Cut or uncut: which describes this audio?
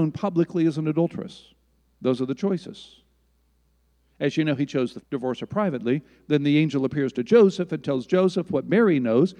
cut